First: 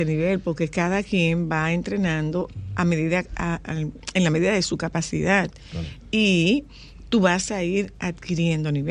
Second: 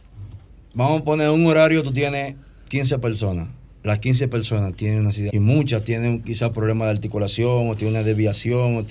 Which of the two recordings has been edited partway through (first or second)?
second